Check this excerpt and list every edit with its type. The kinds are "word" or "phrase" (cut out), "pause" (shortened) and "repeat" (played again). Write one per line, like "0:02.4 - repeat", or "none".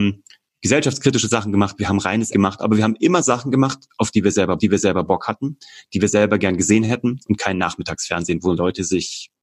0:02.3 - word
0:04.6 - repeat